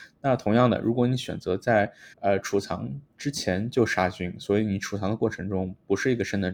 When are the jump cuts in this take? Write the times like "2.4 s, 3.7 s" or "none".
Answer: 2.1 s, 3.1 s

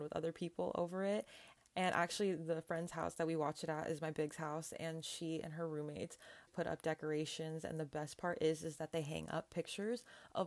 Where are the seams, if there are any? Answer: 6.5 s

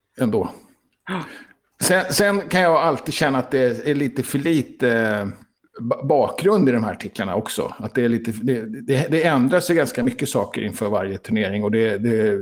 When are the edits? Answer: none

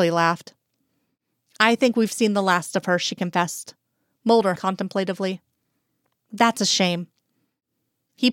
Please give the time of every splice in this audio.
4.6 s

